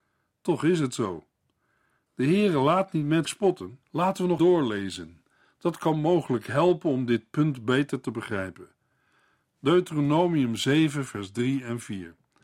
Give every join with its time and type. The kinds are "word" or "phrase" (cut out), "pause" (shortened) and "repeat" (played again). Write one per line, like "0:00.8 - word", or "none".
0:03.2 - word
0:03.8 - pause
0:04.4 - word